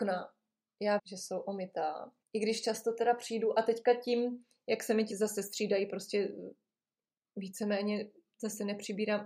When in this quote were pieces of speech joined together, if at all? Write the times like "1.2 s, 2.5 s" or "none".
1.0 s, 2.2 s, 5.1 s